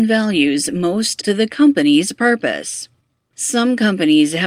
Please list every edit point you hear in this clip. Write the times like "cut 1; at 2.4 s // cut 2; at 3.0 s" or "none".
cut 1; at 1.2 s